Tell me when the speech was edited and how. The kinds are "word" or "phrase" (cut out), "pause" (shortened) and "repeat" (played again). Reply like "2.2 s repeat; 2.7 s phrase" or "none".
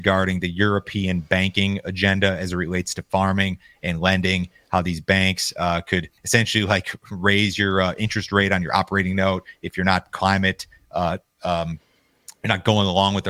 6.2 s pause